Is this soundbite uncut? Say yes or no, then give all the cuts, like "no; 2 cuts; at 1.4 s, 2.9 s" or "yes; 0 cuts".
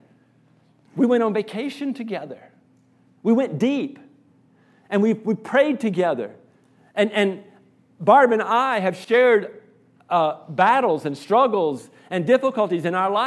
yes; 0 cuts